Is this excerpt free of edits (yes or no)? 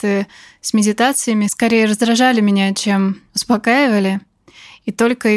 yes